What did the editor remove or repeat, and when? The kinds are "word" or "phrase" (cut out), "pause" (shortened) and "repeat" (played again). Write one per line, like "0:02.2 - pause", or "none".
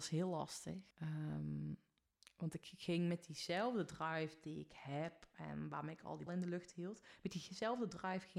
0:00.9 - pause
0:06.3 - word